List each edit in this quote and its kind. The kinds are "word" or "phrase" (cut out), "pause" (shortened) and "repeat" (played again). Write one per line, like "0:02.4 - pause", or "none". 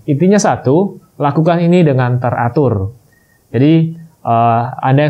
none